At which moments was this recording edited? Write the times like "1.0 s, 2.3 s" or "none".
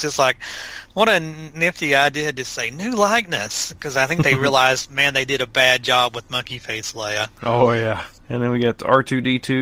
none